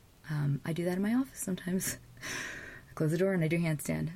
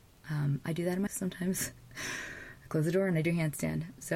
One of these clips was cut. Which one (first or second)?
second